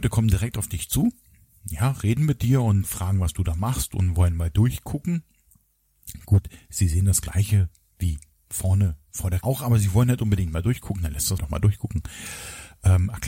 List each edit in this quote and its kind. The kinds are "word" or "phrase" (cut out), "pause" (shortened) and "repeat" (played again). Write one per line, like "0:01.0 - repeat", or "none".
0:02.8 - word
0:09.4 - word
0:11.4 - word